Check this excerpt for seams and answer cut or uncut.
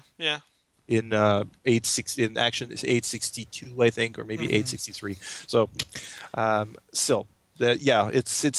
uncut